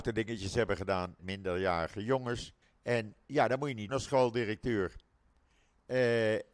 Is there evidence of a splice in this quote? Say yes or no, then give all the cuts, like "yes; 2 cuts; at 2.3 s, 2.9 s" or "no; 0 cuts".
yes; 3 cuts; at 1.2 s, 2.6 s, 3.9 s